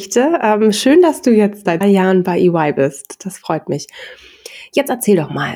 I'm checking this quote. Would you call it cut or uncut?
cut